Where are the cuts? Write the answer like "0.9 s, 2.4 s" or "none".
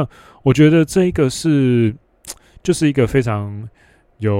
none